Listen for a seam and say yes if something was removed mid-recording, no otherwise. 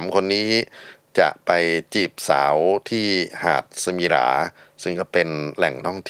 no